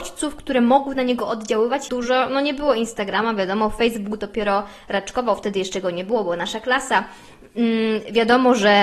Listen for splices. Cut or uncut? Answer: cut